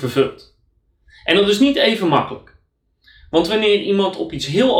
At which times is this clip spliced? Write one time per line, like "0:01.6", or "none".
none